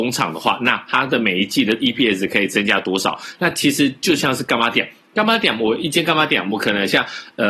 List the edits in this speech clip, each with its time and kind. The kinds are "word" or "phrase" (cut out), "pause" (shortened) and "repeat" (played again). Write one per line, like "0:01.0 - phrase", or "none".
none

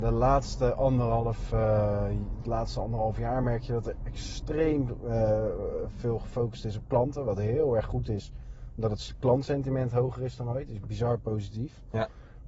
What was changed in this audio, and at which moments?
none

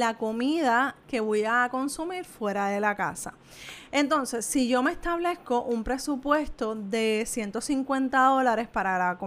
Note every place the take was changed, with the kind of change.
none

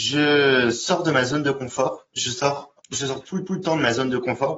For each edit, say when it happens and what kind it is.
0:02.1 - pause
0:02.8 - pause
0:03.5 - repeat

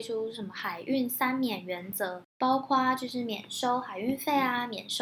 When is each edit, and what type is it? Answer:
0:02.3 - pause

